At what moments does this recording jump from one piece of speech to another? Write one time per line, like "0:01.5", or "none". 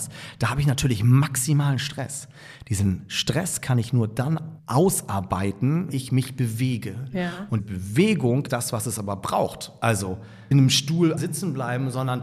0:05.9
0:07.6
0:08.5
0:10.5
0:11.2